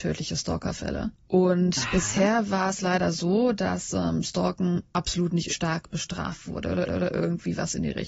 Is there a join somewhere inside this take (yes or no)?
yes